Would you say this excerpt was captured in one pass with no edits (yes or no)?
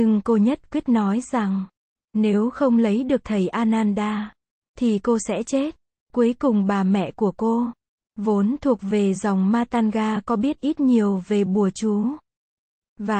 yes